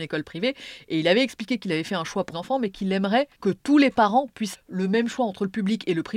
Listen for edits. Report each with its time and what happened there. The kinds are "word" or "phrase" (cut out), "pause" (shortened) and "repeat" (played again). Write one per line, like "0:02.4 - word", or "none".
0:02.3 - word
0:03.3 - pause
0:04.5 - word